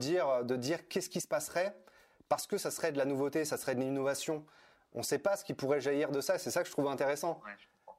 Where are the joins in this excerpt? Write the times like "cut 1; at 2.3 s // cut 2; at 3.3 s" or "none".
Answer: none